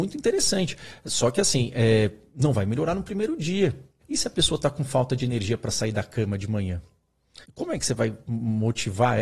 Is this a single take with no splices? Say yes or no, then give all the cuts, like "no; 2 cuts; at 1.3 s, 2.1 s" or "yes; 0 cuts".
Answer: no; 2 cuts; at 4.0 s, 7.4 s